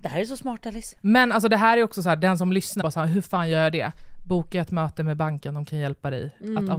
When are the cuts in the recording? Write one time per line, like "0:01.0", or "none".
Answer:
0:02.8